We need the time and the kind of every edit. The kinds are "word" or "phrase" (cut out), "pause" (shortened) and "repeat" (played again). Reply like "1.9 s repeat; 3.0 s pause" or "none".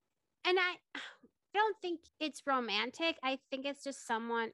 1.5 s word; 2.1 s pause